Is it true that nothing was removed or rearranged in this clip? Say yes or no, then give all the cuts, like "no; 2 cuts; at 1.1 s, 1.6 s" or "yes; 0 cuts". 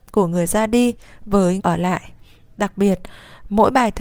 no; 1 cut; at 1.6 s